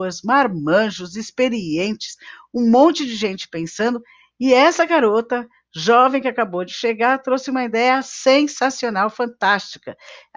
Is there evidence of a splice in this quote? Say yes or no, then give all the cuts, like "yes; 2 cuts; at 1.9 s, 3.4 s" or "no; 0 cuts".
no; 0 cuts